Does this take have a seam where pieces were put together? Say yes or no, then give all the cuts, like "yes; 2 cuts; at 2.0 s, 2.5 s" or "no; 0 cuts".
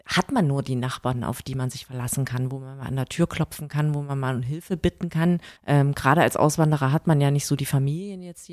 yes; 1 cut; at 5.6 s